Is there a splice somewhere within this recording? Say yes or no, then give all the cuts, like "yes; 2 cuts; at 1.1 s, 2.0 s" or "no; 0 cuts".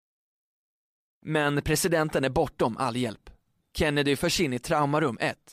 no; 0 cuts